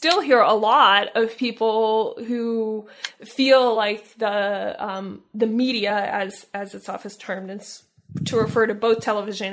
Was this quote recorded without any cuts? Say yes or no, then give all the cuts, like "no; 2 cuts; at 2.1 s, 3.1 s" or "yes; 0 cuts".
yes; 0 cuts